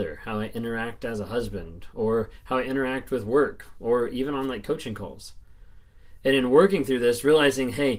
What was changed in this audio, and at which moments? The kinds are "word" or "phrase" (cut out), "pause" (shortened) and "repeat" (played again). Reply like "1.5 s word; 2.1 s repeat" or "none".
none